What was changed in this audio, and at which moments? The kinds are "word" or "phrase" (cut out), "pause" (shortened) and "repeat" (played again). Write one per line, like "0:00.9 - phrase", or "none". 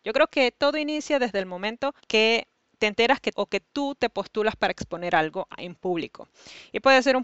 0:02.0 - pause
0:03.3 - phrase